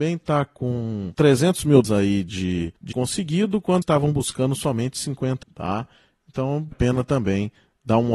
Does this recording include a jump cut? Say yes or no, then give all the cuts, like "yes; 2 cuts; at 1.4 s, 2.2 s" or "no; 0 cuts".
yes; 5 cuts; at 1.8 s, 2.9 s, 3.8 s, 5.4 s, 6.7 s